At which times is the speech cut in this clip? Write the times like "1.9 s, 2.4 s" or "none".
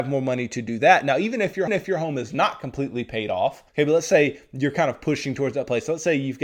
1.7 s, 3.7 s